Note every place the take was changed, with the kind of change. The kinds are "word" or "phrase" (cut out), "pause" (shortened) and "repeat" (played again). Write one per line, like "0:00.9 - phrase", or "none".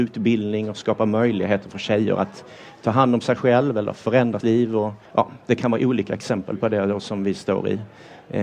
0:04.4 - word
0:05.1 - pause